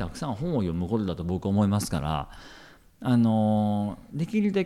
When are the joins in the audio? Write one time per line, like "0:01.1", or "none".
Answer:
none